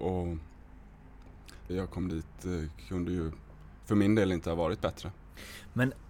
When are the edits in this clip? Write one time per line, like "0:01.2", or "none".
0:01.7